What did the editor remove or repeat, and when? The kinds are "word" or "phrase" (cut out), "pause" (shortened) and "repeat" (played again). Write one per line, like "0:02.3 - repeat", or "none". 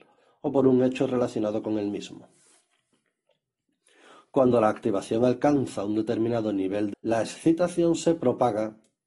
0:06.9 - word